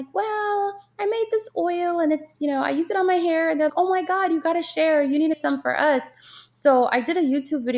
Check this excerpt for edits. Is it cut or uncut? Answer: cut